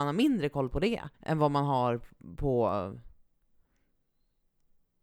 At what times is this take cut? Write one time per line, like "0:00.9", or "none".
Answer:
0:01.1